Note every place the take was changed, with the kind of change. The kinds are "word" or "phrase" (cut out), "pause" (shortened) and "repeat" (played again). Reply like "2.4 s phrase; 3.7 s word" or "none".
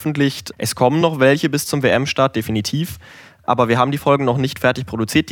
none